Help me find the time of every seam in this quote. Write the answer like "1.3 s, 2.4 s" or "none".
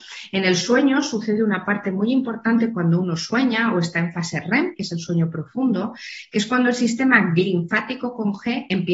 none